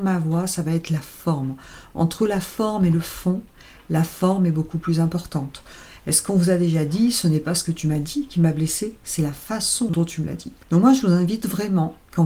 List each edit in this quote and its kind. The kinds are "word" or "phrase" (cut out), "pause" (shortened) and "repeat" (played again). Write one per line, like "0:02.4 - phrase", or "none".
none